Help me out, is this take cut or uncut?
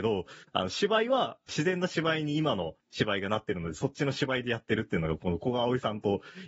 cut